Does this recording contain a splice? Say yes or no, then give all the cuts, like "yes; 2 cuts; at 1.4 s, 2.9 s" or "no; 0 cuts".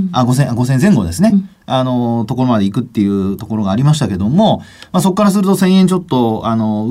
no; 0 cuts